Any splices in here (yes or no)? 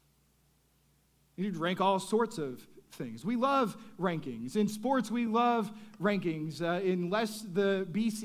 no